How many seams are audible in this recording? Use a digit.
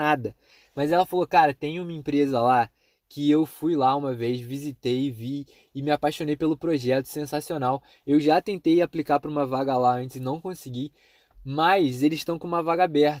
0